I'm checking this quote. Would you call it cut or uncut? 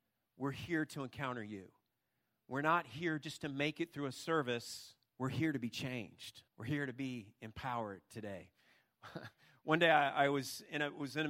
cut